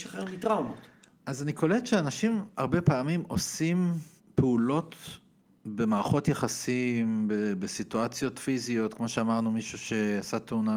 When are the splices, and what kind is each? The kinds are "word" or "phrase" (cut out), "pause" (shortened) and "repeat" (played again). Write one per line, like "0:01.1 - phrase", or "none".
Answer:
0:01.0 - pause
0:04.2 - pause

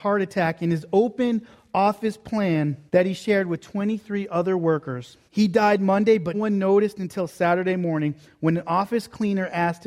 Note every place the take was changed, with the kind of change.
0:02.9 - pause
0:05.3 - pause
0:06.3 - word

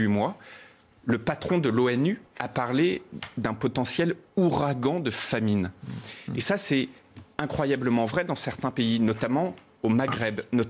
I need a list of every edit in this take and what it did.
0:02.3 - pause

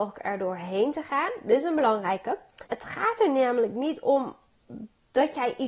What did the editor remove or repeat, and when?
0:02.7 - pause

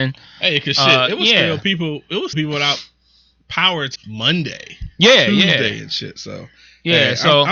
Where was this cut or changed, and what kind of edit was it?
0:02.3 - word
0:04.0 - word

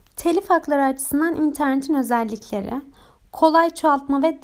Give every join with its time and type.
none

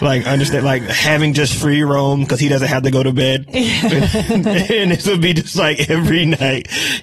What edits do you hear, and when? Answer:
none

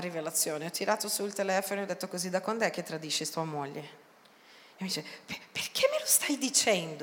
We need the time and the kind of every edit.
none

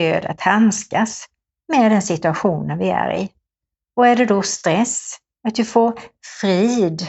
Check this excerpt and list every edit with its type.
none

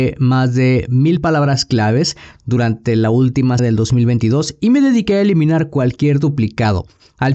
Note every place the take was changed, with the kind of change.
0:03.6 - word

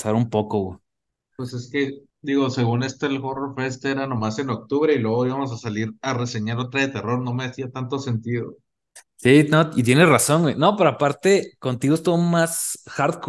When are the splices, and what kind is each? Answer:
0:02.1 - pause

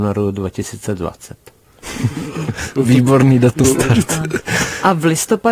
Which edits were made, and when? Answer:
0:03.6 - word

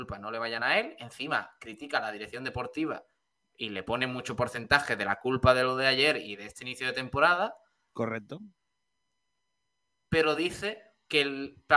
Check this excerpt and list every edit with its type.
none

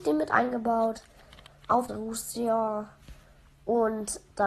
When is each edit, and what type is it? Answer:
0:01.9 - phrase

